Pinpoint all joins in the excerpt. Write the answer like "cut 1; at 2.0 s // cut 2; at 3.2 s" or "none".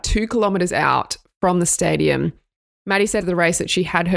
cut 1; at 3.2 s